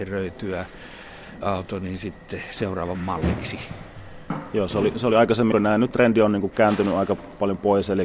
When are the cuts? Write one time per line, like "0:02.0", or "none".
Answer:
0:01.4
0:02.9
0:05.5
0:05.9